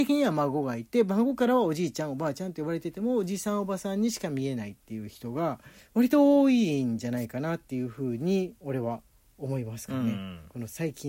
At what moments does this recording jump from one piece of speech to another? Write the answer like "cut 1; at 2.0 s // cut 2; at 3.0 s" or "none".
cut 1; at 5.8 s